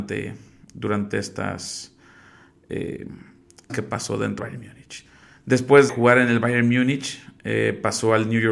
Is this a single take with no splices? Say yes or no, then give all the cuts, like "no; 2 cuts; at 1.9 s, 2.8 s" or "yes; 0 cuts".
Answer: no; 3 cuts; at 3.7 s, 4.4 s, 5.9 s